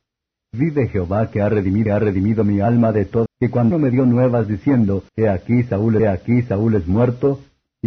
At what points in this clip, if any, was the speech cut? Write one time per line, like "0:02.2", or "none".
0:01.9
0:03.3
0:03.7
0:05.1
0:06.0